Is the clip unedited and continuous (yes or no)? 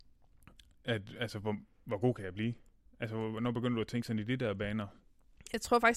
yes